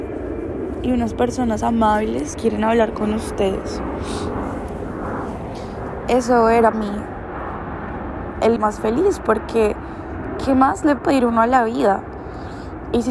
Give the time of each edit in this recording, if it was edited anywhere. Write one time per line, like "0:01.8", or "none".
0:02.3
0:06.7
0:08.6
0:11.0